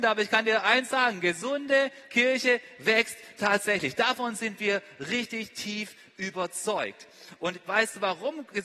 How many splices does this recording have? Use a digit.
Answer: 0